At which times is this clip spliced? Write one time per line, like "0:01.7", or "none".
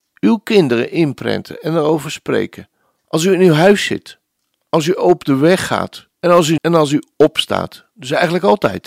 0:02.8
0:06.1
0:06.6